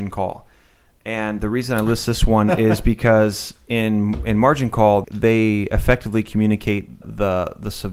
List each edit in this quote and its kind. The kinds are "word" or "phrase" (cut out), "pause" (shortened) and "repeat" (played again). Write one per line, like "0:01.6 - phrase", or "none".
0:05.0 - word
0:07.0 - word